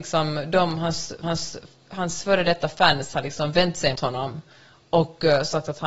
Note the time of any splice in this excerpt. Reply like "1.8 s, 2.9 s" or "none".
1.2 s, 4.0 s

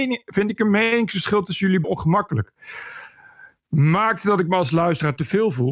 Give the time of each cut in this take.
1.8 s

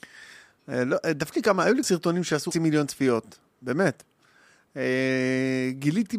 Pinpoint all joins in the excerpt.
1.3 s, 1.8 s, 2.5 s

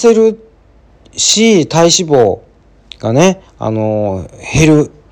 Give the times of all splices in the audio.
3.5 s

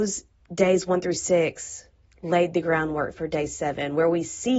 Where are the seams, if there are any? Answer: none

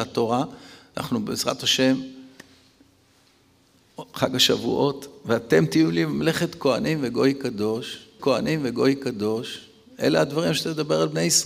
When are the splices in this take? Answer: 8.2 s

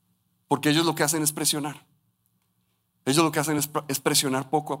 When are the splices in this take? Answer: none

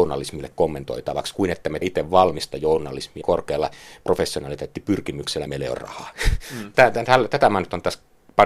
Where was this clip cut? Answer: 1.8 s, 3.2 s, 5.5 s, 6.7 s, 7.1 s

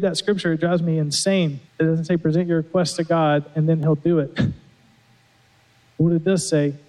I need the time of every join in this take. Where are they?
1.7 s

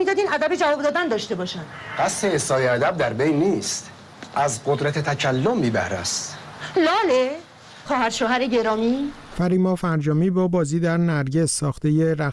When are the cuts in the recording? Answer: 7.9 s

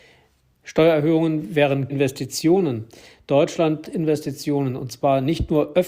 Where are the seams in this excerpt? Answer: 1.9 s, 3.8 s

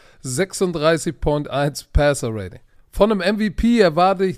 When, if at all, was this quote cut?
2.8 s

